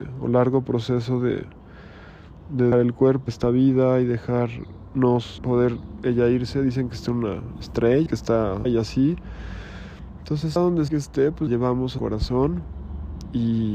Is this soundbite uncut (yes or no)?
no